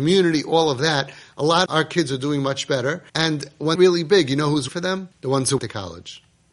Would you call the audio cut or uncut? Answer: cut